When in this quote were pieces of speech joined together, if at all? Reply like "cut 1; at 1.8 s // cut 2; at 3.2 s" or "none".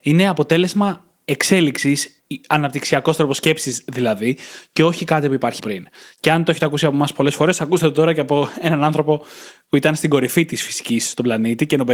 cut 1; at 5.6 s